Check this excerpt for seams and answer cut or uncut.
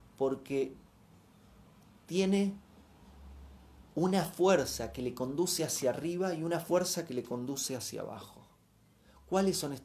uncut